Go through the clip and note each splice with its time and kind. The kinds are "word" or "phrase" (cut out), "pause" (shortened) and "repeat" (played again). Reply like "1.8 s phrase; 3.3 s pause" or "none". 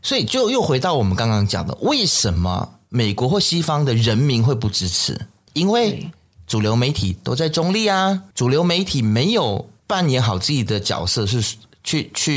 none